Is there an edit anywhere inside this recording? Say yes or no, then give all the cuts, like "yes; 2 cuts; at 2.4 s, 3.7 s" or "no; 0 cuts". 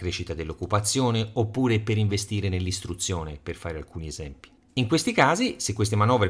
yes; 1 cut; at 4.6 s